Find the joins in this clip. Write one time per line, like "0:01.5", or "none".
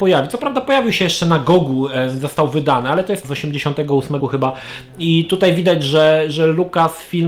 0:03.2
0:04.2